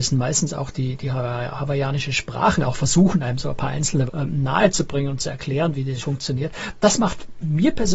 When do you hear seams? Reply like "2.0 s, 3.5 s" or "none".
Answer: 2.5 s, 4.1 s, 6.0 s